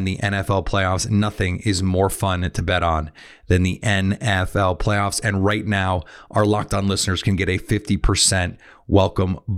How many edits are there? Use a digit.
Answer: 0